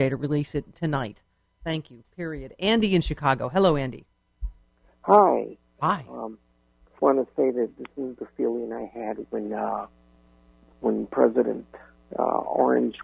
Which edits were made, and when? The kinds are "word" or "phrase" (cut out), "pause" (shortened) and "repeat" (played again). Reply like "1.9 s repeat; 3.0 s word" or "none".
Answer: 7.0 s word